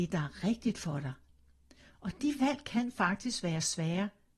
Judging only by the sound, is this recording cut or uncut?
uncut